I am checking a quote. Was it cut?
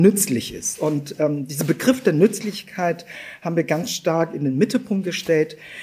no; 0 cuts

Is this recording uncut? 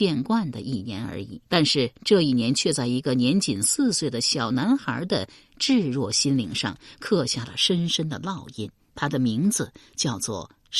no; 1 cut; at 1.5 s

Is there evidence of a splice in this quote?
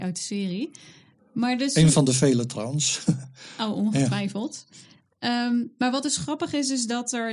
no; 0 cuts

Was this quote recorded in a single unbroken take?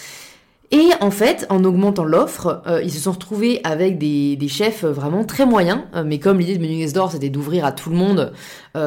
yes; 0 cuts

